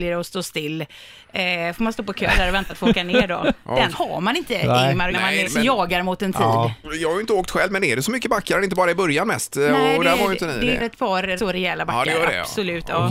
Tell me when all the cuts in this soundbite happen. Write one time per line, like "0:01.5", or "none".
0:02.7
0:03.9
0:05.1
0:05.4
0:10.8
0:11.4